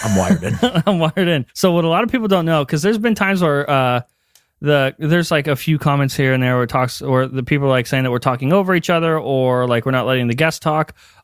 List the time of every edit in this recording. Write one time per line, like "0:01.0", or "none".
0:01.5